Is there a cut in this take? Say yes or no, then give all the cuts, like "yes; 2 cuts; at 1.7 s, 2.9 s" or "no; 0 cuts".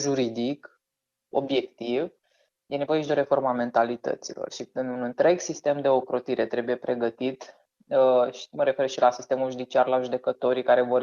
no; 0 cuts